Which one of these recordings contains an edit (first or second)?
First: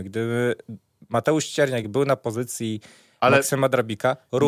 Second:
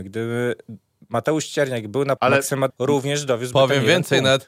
second